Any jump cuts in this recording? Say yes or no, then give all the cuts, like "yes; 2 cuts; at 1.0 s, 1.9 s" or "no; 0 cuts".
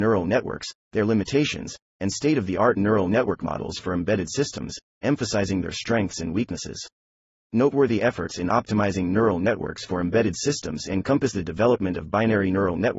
no; 0 cuts